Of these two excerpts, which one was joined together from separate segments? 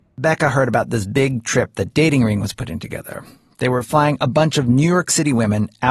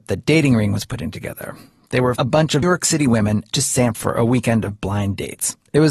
second; 4 cuts; at 2.2 s, 2.6 s, 3.5 s, 3.9 s

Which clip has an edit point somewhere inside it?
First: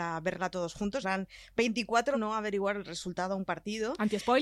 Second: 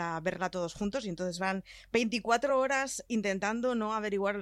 first; 2 cuts; at 1.0 s, 2.1 s

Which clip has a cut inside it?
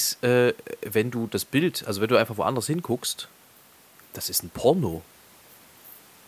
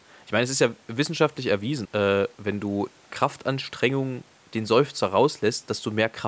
second; 2 cuts; at 1.8 s, 3.1 s

